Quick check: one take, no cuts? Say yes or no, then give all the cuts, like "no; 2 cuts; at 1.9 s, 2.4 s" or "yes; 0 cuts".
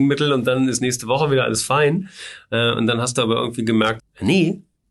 no; 1 cut; at 4.0 s